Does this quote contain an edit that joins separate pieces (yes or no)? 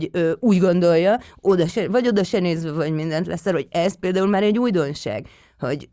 no